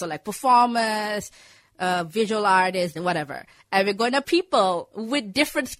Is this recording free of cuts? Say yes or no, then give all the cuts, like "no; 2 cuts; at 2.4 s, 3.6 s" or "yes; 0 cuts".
no; 2 cuts; at 2.9 s, 4.2 s